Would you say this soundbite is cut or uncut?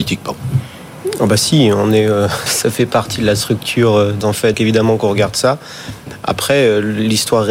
cut